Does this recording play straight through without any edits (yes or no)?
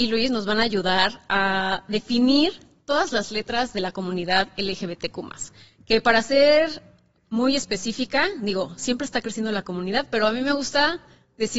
yes